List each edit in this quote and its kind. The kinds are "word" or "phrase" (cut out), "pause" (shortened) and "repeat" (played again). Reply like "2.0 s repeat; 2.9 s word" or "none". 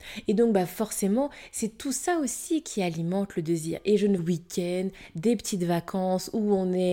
4.2 s phrase